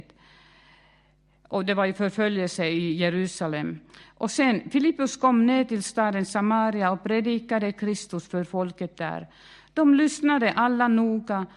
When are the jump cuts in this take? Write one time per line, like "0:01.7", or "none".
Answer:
none